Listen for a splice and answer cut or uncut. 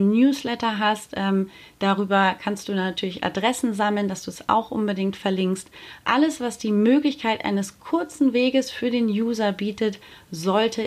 uncut